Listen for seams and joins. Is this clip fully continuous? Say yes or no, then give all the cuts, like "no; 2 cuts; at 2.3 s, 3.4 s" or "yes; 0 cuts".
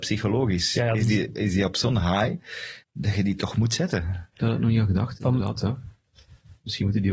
no; 2 cuts; at 2.8 s, 4.3 s